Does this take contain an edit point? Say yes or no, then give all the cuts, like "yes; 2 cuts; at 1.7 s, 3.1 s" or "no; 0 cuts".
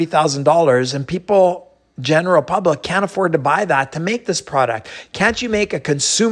no; 0 cuts